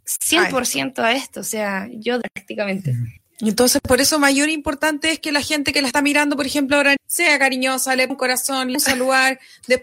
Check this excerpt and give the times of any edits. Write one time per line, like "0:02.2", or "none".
0:02.2
0:03.2
0:07.0
0:08.1
0:08.7

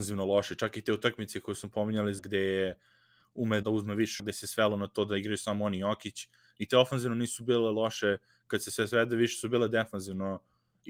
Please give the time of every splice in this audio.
0:02.2
0:03.6
0:04.2
0:06.7

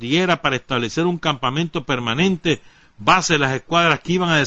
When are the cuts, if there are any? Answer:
none

